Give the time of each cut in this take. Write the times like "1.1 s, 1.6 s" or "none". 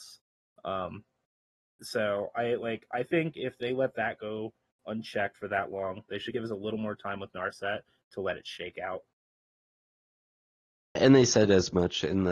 none

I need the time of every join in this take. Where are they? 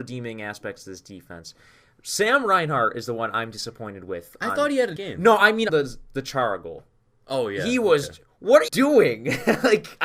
5.0 s, 5.7 s, 8.7 s

